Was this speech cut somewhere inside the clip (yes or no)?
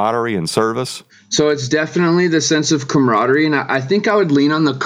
yes